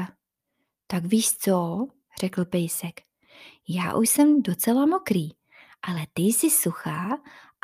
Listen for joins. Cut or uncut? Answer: uncut